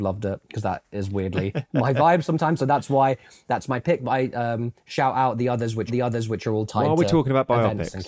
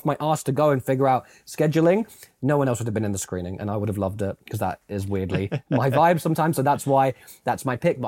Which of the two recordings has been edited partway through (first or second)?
first